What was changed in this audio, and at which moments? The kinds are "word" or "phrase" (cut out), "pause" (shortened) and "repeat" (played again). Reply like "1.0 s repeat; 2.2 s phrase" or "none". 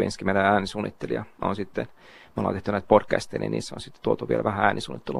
none